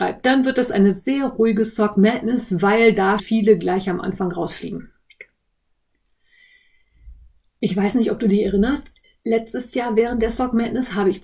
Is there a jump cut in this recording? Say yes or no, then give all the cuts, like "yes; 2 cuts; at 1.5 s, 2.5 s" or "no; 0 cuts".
yes; 1 cut; at 3.2 s